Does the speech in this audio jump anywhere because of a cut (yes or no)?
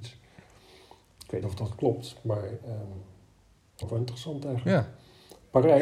yes